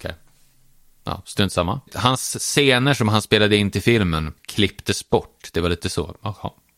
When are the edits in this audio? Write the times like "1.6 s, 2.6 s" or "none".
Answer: 1.9 s, 4.4 s